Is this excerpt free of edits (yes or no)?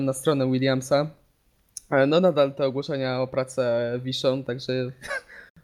yes